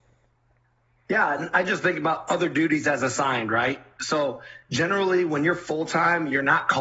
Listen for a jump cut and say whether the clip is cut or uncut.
uncut